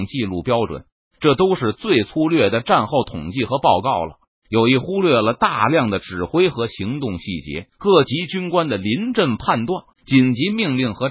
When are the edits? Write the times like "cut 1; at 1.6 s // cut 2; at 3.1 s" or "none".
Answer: cut 1; at 7.7 s // cut 2; at 9.9 s